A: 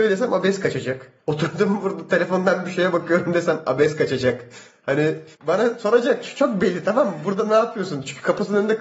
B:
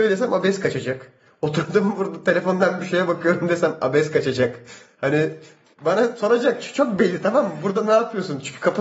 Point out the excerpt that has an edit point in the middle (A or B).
A